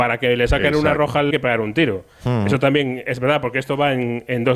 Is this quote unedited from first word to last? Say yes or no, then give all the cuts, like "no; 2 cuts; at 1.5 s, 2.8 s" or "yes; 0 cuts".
no; 1 cut; at 1.3 s